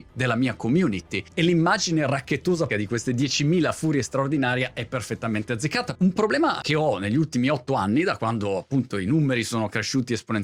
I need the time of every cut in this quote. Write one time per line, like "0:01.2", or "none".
0:02.7